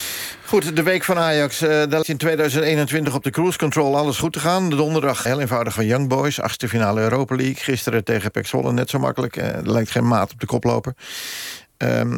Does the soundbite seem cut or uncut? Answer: cut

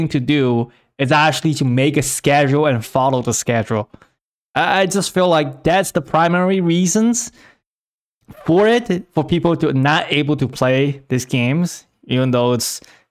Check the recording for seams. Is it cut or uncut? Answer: uncut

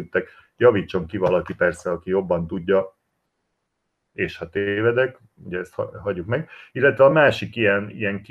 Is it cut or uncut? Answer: uncut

